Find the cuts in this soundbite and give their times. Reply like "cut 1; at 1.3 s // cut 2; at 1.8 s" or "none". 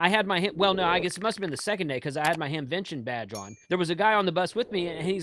cut 1; at 3.6 s

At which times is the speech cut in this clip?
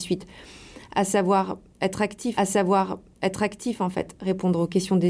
cut 1; at 2.4 s

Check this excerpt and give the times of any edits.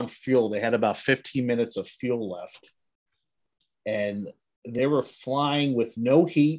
none

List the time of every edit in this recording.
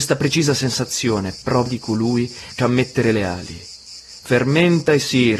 cut 1; at 1.7 s // cut 2; at 2.6 s

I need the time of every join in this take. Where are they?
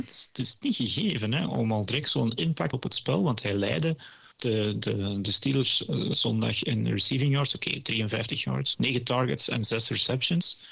cut 1; at 1.5 s // cut 2; at 2.7 s // cut 3; at 4.3 s // cut 4; at 8.7 s

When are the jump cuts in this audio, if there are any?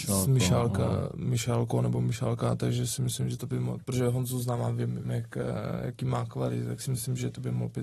cut 1; at 5.0 s

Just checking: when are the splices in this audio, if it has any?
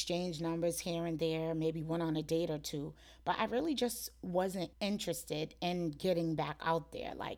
cut 1; at 4.7 s

